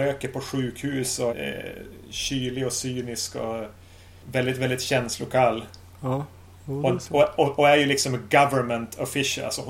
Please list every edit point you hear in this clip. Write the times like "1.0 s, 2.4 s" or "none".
1.3 s